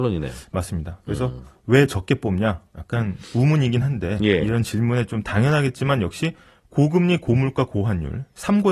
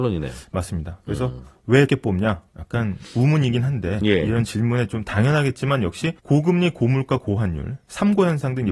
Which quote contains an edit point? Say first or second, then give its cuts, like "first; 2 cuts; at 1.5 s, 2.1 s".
second; 2 cuts; at 1.9 s, 6.2 s